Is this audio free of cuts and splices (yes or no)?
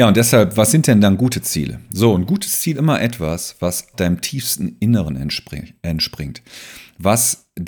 no